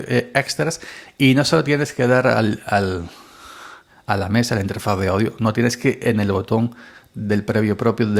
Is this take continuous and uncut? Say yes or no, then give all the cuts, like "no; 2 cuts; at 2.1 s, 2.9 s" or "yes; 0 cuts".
yes; 0 cuts